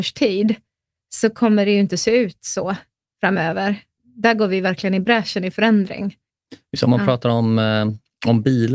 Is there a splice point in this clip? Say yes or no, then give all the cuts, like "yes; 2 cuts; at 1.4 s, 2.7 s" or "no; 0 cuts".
no; 0 cuts